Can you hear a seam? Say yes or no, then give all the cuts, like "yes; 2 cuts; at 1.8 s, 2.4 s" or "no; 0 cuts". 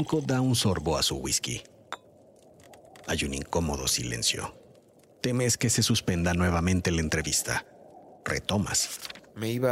no; 0 cuts